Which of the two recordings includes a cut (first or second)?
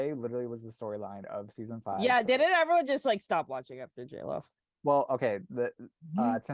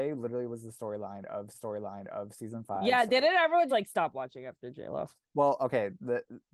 second